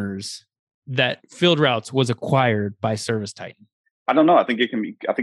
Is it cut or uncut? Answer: uncut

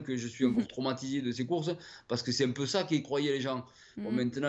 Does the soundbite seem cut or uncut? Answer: uncut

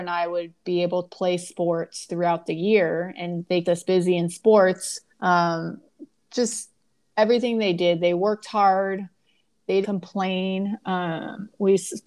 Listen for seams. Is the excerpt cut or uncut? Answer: cut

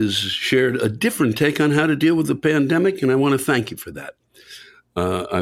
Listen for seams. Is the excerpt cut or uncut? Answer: uncut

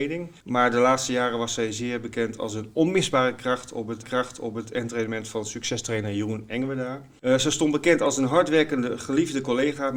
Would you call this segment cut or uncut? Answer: cut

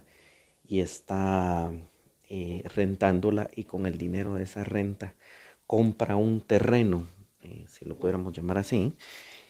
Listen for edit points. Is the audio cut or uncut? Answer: uncut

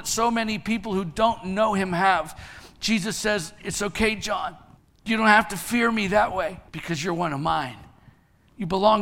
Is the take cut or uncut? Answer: cut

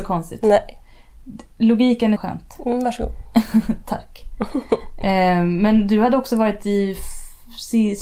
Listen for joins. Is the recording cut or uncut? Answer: cut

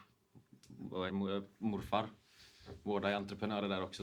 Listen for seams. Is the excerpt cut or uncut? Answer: cut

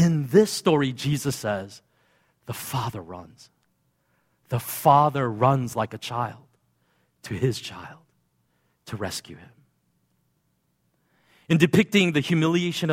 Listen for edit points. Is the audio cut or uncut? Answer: uncut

